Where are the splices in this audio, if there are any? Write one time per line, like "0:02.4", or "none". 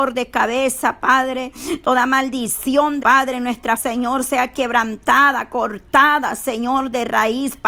0:03.0
0:03.8